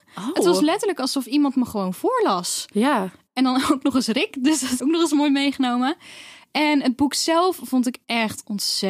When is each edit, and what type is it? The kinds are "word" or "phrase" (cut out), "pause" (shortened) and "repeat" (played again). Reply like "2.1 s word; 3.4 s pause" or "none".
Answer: 4.8 s word

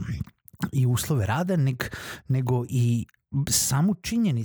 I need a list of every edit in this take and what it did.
2.7 s word

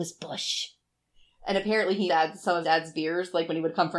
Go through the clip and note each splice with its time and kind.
2.1 s phrase; 2.6 s word

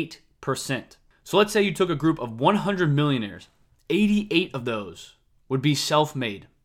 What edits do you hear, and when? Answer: none

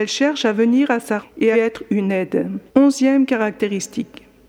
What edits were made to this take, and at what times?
1.2 s word; 1.5 s phrase; 2.7 s pause

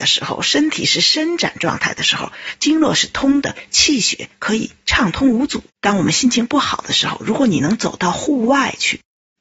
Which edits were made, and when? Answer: 5.7 s pause

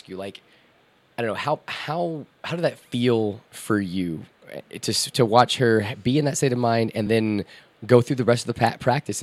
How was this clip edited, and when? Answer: none

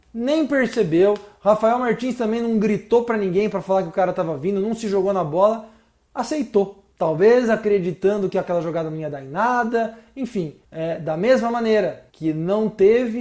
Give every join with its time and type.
6.9 s pause; 10.6 s pause; 12.1 s pause

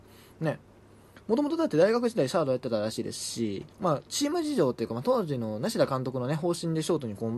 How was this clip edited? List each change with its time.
3.7 s pause

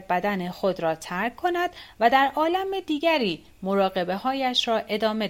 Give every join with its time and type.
none

